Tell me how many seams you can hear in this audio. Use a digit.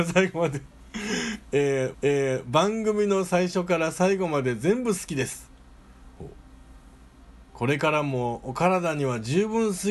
1